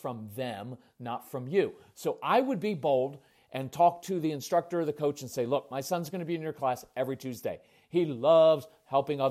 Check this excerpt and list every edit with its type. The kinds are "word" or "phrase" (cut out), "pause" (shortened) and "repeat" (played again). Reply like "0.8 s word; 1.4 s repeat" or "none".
none